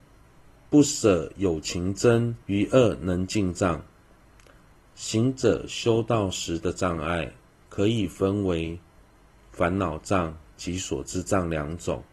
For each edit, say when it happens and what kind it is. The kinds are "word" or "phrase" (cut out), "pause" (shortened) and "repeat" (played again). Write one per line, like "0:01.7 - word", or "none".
0:02.4 - pause